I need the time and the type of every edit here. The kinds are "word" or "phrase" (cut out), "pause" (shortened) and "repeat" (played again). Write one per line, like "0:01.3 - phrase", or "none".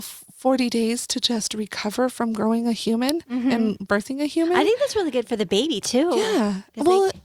none